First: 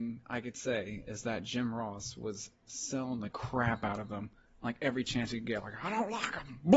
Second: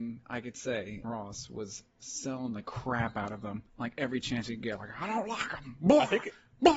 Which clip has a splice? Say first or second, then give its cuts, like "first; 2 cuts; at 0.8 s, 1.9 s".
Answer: second; 2 cuts; at 1.0 s, 3.7 s